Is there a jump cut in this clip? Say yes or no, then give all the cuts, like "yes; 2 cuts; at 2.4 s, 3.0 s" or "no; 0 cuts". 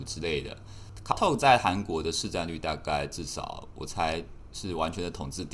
yes; 1 cut; at 1.1 s